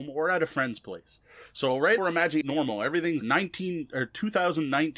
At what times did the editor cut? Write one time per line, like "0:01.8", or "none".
0:02.0
0:02.4
0:03.2